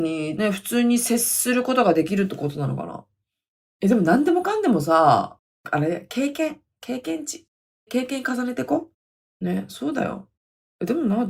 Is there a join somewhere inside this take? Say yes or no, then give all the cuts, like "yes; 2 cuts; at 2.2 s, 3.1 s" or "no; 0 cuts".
no; 0 cuts